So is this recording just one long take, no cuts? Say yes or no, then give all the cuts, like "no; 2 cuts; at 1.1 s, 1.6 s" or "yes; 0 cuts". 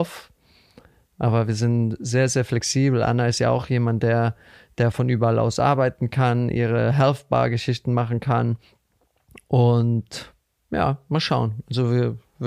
no; 1 cut; at 4.9 s